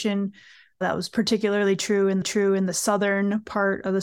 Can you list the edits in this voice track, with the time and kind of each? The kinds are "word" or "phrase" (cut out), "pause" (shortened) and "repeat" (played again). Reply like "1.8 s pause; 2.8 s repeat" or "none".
2.2 s repeat

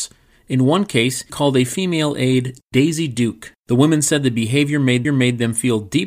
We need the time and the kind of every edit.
1.3 s word; 3.6 s pause; 5.0 s repeat

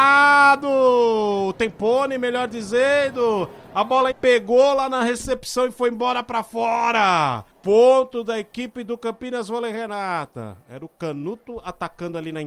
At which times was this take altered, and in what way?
4.1 s word; 7.5 s pause

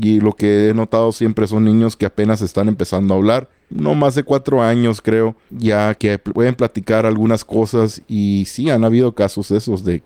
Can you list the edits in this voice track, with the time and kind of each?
none

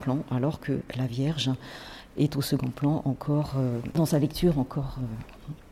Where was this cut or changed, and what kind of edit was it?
none

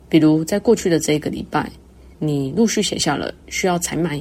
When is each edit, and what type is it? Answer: 2.1 s pause

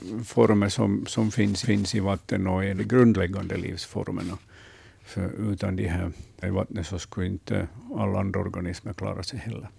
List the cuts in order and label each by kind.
1.6 s repeat; 2.8 s word; 6.4 s word

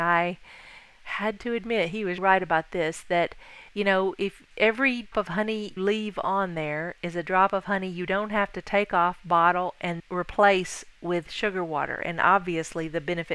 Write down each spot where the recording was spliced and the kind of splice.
2.2 s word; 3.7 s pause; 5.1 s word; 5.8 s word; 10.0 s word

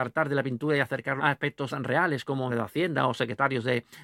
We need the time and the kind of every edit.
1.2 s word; 1.7 s word; 2.5 s word

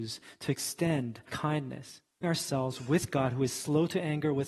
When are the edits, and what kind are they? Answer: 1.3 s phrase; 2.2 s word

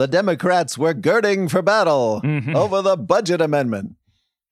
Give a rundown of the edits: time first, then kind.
none

